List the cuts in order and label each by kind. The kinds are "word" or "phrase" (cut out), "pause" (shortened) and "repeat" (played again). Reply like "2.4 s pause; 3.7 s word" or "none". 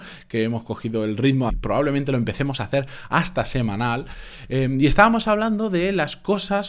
1.5 s phrase